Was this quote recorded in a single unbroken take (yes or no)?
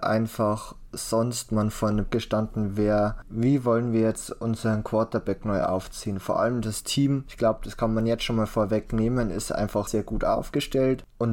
no